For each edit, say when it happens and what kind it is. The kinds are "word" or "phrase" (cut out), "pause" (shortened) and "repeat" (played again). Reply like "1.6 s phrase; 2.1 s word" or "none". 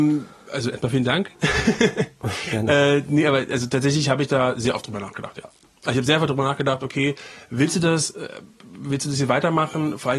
none

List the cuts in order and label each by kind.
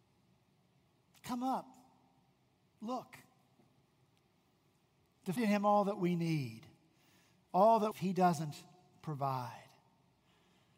5.4 s word; 7.9 s phrase

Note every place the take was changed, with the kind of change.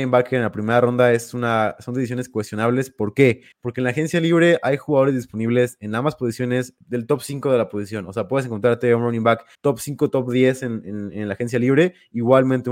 3.5 s pause; 6.8 s pause; 9.5 s pause

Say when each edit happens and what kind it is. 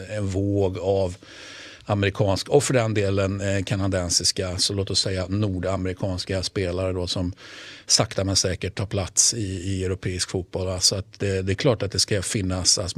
none

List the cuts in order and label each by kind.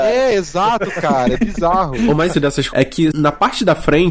2.3 s word; 2.7 s word

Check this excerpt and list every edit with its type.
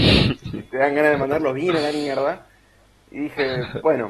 none

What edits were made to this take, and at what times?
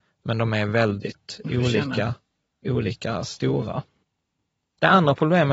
none

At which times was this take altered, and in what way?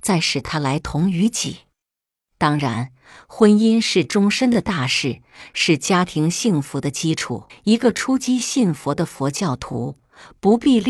7.5 s pause

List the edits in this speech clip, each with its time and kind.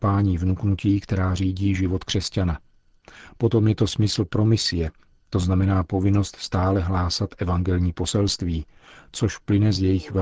none

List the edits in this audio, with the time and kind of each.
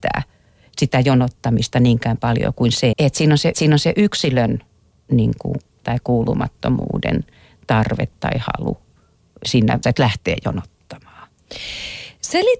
2.9 s word; 3.5 s repeat; 5.8 s word; 9.4 s word; 9.8 s phrase

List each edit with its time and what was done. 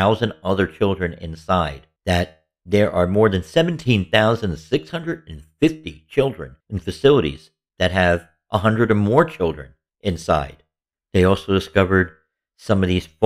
2.0 s pause; 6.6 s pause

